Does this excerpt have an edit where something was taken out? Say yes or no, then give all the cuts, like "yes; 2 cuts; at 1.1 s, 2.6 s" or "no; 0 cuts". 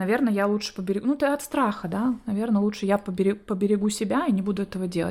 no; 0 cuts